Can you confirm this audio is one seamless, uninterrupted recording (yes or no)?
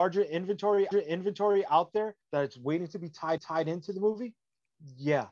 no